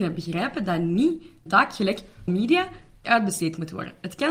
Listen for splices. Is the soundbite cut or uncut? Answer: cut